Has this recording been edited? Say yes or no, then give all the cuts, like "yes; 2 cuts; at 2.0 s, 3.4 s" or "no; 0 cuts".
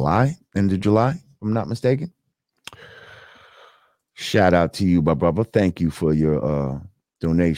no; 0 cuts